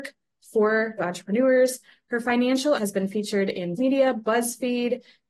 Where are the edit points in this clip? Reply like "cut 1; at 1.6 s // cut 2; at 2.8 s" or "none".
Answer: cut 1; at 1.0 s // cut 2; at 2.8 s // cut 3; at 3.8 s